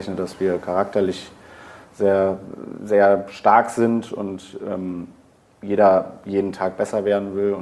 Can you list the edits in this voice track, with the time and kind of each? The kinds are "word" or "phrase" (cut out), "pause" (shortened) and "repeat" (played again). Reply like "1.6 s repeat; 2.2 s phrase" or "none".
none